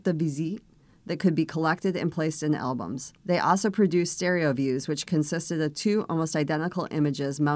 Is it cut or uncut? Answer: cut